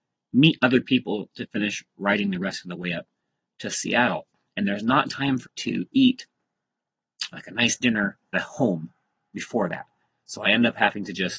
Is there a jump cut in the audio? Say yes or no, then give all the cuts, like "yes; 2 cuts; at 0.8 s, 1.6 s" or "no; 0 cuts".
yes; 2 cuts; at 5.4 s, 8.3 s